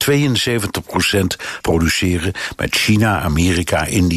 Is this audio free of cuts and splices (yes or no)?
no